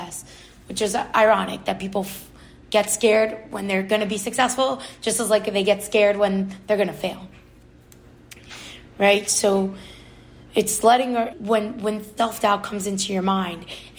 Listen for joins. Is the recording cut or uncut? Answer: cut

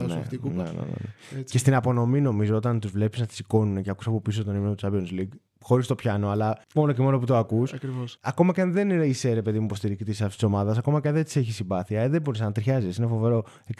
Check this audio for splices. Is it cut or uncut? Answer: cut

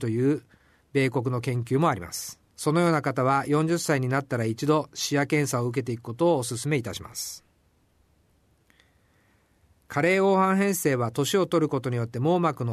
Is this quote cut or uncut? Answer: cut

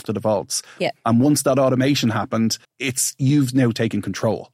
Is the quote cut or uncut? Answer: cut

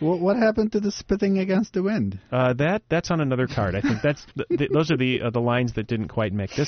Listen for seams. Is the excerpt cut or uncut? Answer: cut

